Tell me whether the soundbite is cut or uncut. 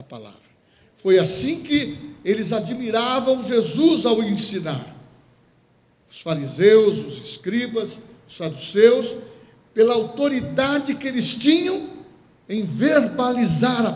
uncut